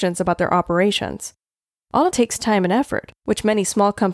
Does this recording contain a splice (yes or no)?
yes